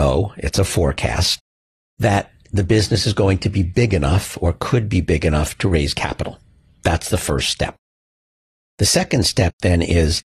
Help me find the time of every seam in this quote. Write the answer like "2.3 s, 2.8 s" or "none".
none